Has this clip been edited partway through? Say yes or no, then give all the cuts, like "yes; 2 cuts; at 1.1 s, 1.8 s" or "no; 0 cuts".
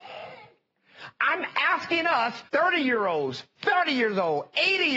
yes; 1 cut; at 2.5 s